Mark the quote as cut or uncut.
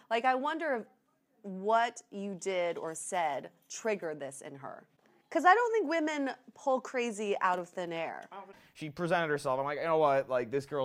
uncut